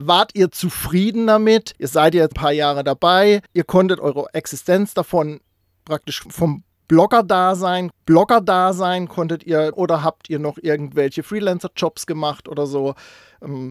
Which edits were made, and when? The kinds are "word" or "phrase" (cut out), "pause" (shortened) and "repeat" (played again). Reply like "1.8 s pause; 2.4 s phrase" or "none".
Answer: 1.7 s pause; 2.3 s word; 3.5 s pause; 6.3 s word; 7.9 s repeat; 9.7 s word